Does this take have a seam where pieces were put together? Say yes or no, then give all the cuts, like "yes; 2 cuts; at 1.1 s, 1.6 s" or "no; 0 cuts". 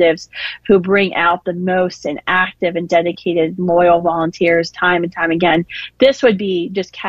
no; 0 cuts